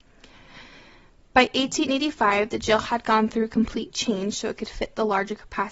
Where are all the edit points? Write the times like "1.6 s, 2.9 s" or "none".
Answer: none